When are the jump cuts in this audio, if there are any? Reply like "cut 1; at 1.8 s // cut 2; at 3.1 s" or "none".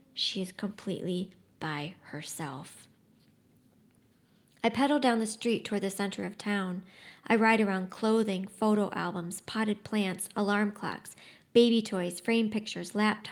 none